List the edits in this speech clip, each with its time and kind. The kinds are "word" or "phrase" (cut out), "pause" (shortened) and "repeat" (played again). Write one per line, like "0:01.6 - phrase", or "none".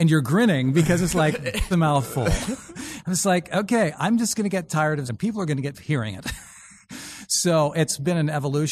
0:01.7 - phrase
0:05.1 - phrase
0:05.7 - word